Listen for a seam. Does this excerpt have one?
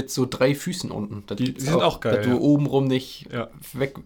no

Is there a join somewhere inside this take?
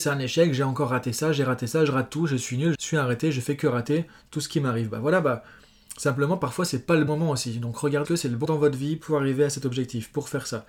yes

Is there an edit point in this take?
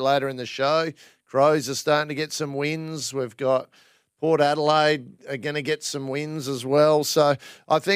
no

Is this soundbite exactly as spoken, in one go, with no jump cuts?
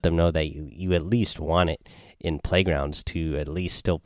yes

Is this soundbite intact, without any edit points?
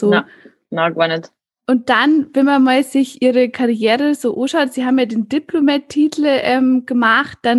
yes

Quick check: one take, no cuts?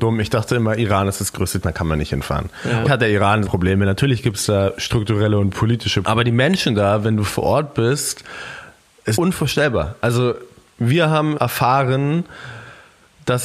no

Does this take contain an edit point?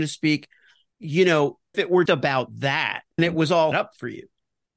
yes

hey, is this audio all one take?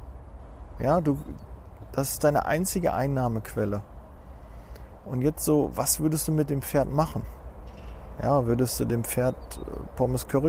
yes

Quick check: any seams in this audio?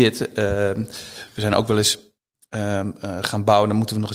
no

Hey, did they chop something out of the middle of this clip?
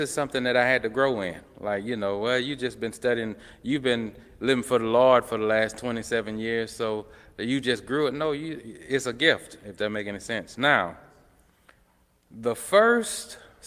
no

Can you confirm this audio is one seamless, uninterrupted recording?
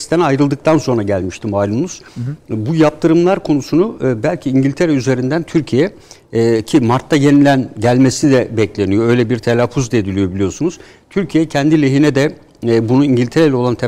yes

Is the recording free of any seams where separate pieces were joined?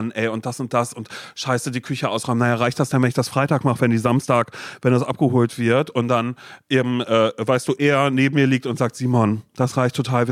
yes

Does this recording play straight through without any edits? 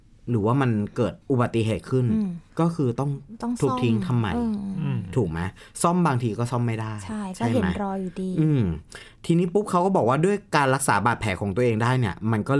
no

